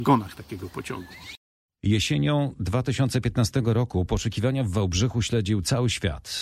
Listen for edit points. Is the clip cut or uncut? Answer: uncut